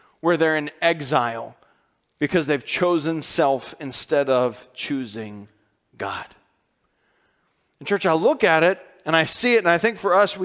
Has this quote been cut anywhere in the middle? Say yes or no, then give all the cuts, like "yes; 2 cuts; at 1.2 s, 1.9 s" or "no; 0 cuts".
no; 0 cuts